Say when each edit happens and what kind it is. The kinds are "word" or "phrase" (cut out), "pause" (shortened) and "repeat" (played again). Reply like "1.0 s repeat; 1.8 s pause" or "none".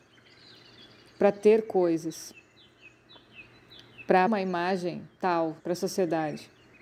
4.3 s word; 5.6 s pause